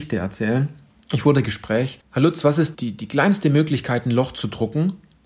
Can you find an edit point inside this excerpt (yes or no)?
yes